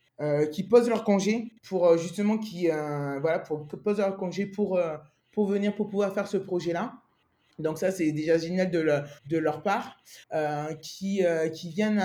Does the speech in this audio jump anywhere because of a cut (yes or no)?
yes